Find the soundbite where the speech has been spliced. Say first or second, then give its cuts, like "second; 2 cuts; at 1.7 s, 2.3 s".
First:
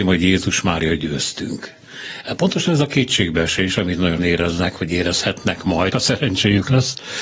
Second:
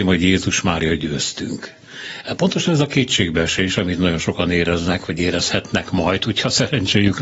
first; 2 cuts; at 4.2 s, 5.9 s